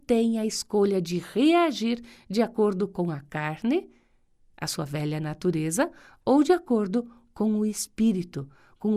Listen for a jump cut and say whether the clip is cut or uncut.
uncut